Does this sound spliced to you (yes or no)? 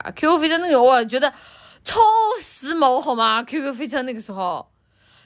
no